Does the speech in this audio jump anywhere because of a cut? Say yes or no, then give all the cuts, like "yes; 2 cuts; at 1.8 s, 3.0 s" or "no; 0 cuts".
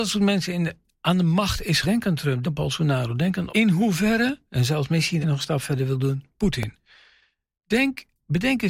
yes; 4 cuts; at 1.8 s, 2.4 s, 3.5 s, 5.2 s